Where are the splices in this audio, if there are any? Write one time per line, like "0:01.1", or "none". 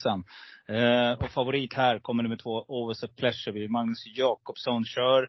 none